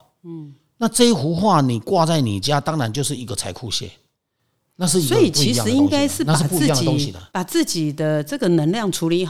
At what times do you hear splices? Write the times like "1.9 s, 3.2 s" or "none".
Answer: 7.3 s

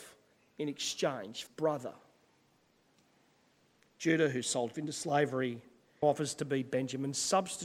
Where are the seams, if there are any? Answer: 1.5 s, 4.7 s, 6.0 s

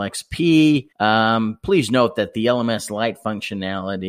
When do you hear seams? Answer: 0.9 s

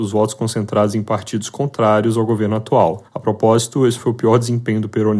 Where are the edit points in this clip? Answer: 3.1 s

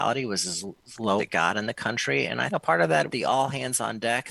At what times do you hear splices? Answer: 1.2 s, 2.5 s, 3.1 s

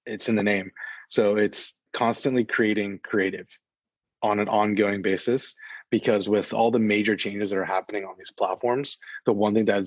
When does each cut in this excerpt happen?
1.9 s

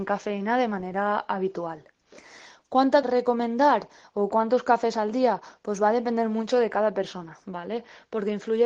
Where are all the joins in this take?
3.0 s

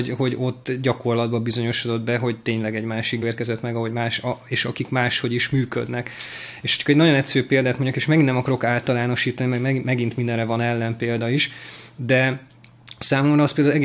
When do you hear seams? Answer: 3.2 s

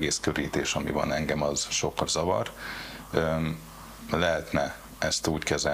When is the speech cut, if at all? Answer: 2.1 s

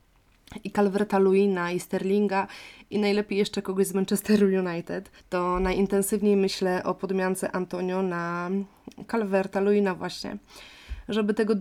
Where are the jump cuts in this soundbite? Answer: 5.2 s

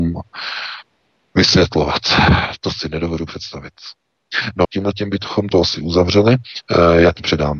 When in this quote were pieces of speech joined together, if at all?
4.6 s

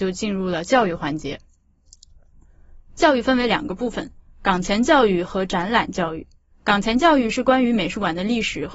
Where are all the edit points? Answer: none

